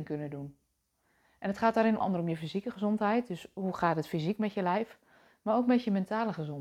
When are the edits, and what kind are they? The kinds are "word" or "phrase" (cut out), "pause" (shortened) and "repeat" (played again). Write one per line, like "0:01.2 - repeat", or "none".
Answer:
0:02.0 - word